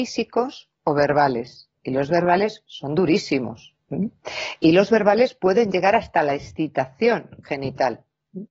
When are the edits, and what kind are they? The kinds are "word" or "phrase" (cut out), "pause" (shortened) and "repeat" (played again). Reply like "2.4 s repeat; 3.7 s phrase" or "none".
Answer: none